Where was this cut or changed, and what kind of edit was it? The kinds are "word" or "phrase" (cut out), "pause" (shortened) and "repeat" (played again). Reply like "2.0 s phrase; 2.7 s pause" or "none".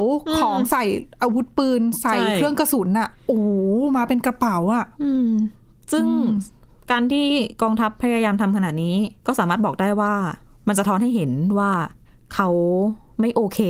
9.2 s pause; 12.1 s pause